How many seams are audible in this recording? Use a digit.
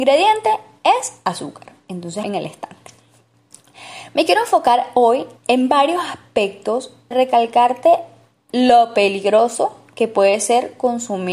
3